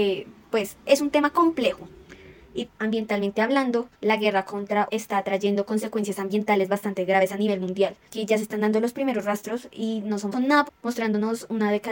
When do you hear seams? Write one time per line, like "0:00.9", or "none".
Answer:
0:02.7
0:03.9
0:04.9
0:08.1
0:10.3
0:10.7